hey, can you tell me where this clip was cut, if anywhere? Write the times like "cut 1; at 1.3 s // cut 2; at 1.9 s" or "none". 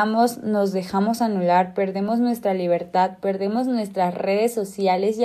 none